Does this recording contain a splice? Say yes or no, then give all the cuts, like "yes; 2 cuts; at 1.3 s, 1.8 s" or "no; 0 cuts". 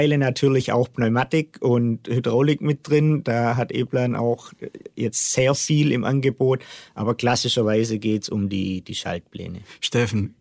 no; 0 cuts